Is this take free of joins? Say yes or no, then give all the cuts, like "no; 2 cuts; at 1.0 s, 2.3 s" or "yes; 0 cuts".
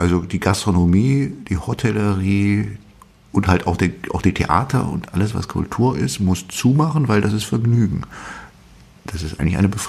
yes; 0 cuts